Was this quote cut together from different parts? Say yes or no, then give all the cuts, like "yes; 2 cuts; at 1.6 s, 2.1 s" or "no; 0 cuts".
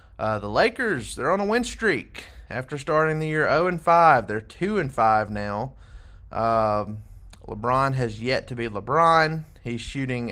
no; 0 cuts